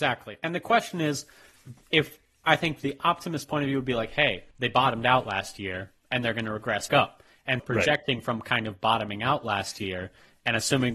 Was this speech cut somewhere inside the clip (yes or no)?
yes